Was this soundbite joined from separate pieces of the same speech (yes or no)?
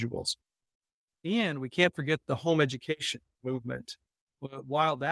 no